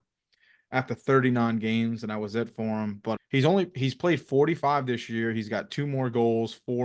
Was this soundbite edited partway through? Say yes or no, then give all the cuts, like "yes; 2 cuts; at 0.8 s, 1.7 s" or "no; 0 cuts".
yes; 1 cut; at 3.2 s